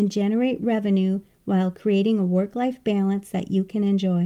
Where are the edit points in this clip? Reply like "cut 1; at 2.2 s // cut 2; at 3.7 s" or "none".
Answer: none